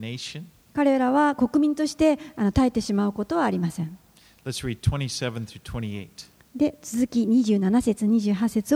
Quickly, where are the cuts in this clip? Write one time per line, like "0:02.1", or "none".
none